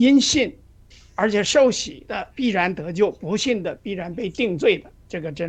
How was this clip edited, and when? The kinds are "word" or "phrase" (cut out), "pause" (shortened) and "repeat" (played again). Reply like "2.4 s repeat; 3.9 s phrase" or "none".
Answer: 2.3 s pause